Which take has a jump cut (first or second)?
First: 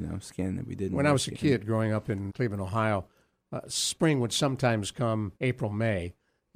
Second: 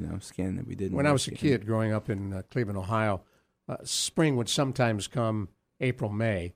first